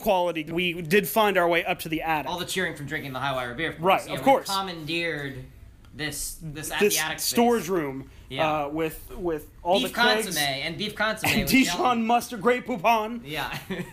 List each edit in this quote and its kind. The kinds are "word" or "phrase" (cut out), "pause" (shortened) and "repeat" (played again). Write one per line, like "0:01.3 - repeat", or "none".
none